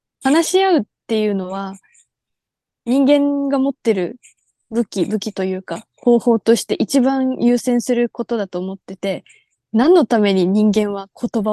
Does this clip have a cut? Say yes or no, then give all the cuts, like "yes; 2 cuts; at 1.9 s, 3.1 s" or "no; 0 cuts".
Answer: no; 0 cuts